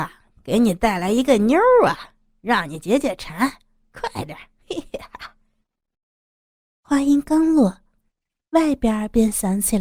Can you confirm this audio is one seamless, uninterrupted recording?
yes; 0 cuts

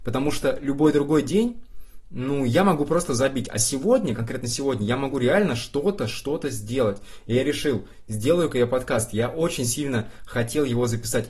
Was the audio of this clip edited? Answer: no; 0 cuts

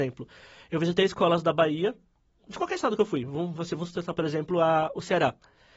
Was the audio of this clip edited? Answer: no; 0 cuts

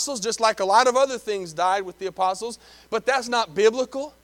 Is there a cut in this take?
no; 0 cuts

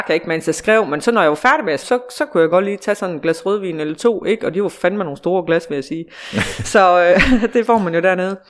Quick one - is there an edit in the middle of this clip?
yes; 1 cut; at 1.8 s

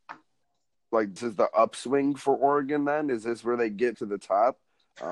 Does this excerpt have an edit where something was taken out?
yes; 2 cuts; at 1.2 s, 3.9 s

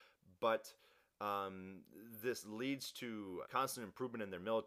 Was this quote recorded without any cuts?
no; 1 cut; at 3.5 s

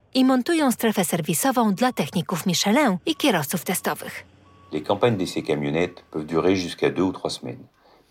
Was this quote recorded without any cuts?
yes; 0 cuts

